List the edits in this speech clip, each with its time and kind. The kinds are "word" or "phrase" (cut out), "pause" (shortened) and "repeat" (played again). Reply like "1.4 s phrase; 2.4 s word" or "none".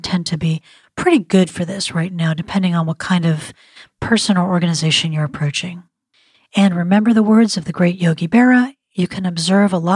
none